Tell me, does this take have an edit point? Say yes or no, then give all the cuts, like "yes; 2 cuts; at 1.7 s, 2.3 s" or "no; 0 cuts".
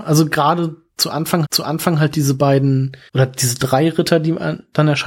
yes; 2 cuts; at 1.4 s, 3.1 s